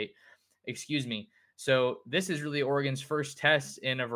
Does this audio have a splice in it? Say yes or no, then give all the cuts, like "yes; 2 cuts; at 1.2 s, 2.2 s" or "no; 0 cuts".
no; 0 cuts